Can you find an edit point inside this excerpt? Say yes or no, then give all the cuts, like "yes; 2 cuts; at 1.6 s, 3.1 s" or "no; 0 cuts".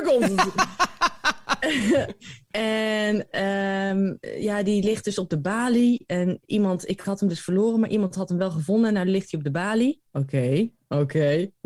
yes; 1 cut; at 10.1 s